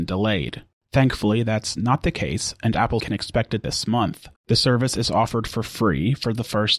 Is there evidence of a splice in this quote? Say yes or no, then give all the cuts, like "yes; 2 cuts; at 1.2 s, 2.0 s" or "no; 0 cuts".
yes; 2 cuts; at 3.0 s, 3.6 s